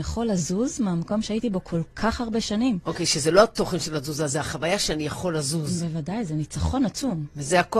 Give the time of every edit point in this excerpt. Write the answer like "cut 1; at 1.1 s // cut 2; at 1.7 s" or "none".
none